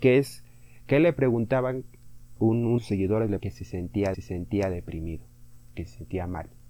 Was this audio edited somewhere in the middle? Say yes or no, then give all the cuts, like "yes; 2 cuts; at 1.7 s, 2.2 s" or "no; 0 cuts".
yes; 4 cuts; at 2.4 s, 2.8 s, 3.4 s, 4.1 s